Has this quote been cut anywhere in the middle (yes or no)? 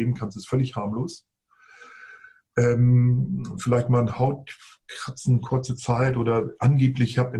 no